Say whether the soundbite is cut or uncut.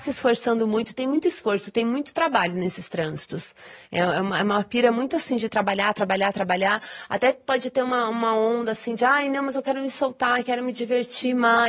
uncut